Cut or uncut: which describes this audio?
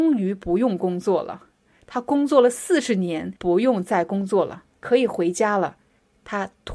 cut